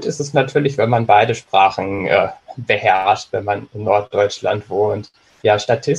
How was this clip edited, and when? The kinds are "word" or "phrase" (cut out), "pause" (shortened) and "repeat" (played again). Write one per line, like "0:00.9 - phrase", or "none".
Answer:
none